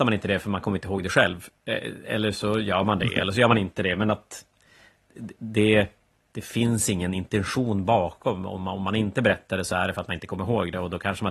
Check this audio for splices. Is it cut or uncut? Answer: uncut